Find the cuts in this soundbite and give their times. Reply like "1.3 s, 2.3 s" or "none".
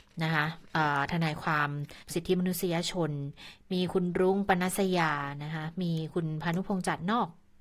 2.0 s